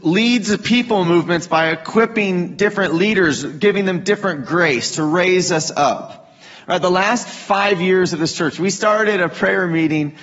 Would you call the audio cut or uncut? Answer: uncut